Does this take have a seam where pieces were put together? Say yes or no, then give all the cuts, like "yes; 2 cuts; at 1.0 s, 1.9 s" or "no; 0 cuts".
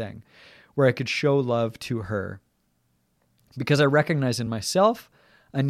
no; 0 cuts